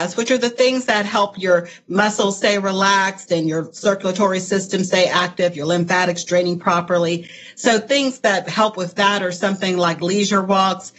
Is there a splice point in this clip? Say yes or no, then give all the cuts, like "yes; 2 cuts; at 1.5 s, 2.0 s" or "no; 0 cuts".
no; 0 cuts